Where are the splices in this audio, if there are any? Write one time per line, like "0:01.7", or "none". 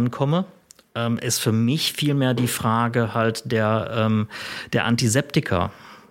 none